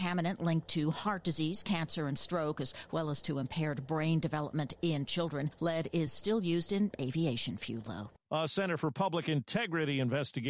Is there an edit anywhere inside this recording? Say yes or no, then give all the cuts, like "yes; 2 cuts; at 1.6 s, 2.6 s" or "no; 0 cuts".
no; 0 cuts